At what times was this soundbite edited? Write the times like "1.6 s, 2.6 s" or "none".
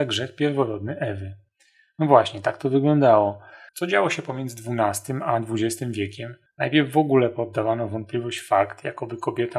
none